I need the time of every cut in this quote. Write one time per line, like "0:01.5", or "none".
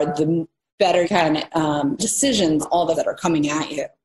0:01.0
0:02.0
0:02.6
0:02.9